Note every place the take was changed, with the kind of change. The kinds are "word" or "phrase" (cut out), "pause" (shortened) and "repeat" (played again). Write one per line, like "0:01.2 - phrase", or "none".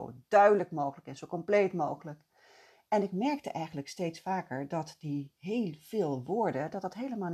none